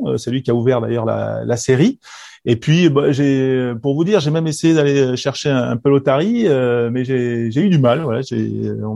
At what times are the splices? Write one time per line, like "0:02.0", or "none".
none

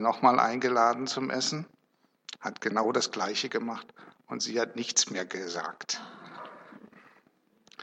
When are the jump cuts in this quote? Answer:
none

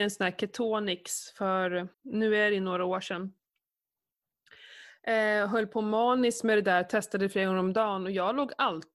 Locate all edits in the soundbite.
0:01.9

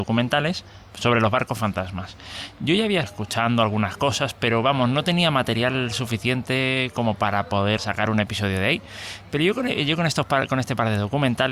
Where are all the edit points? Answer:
0:03.0
0:07.8

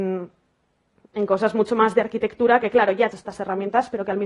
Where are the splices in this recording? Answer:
0:03.1

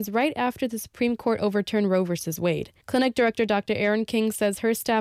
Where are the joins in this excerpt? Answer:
0:02.8

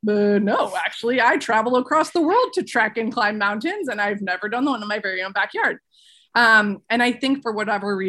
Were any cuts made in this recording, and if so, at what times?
none

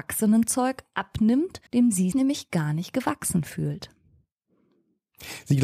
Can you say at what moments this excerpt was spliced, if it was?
0:01.7
0:02.1

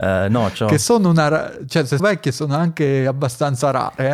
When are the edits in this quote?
0:02.0

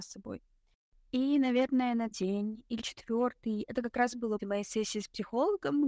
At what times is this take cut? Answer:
0:02.1
0:02.8
0:04.4

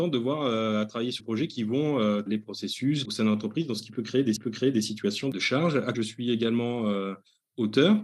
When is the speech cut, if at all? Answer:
0:01.2
0:02.3
0:03.0
0:04.4
0:05.9

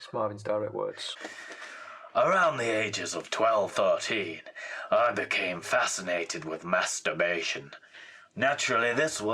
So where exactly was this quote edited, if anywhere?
0:03.7

